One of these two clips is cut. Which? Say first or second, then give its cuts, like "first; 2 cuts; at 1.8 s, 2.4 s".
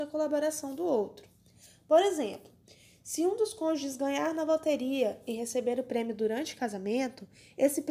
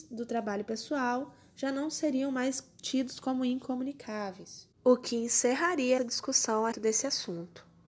second; 3 cuts; at 4.7 s, 6.0 s, 6.7 s